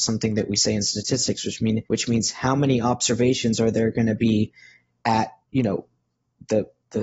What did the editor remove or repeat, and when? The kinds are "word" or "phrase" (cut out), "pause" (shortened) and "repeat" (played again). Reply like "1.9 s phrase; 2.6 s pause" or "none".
1.8 s pause; 5.4 s pause